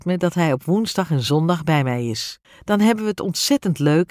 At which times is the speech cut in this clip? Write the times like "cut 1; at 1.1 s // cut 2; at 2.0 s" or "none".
cut 1; at 2.4 s